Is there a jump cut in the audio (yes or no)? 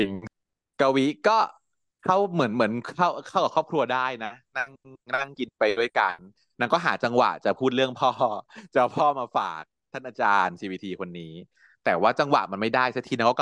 no